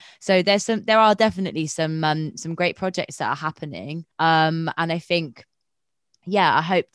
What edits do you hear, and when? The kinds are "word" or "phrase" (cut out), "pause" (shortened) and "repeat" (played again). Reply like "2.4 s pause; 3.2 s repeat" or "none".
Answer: 4.1 s pause